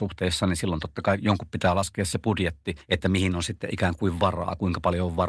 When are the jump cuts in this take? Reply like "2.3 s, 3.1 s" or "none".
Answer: none